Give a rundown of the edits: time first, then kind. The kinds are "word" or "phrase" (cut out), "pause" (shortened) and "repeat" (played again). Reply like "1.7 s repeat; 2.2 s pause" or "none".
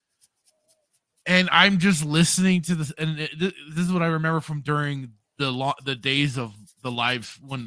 none